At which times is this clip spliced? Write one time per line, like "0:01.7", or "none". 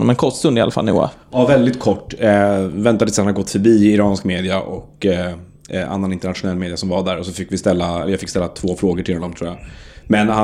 none